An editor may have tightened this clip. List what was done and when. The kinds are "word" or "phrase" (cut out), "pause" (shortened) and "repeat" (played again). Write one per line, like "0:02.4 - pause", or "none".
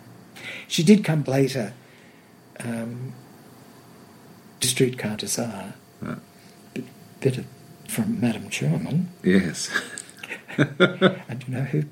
0:01.2 - word
0:04.6 - word
0:05.2 - word
0:07.9 - word